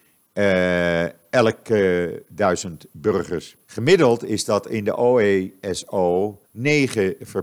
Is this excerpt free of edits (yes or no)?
no